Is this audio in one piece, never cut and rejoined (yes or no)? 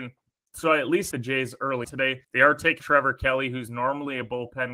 no